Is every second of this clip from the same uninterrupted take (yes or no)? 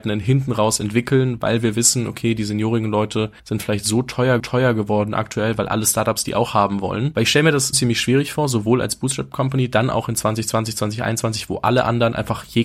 no